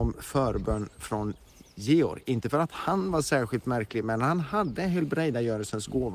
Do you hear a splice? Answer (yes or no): no